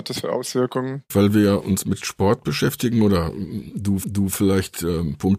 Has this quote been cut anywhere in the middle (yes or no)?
yes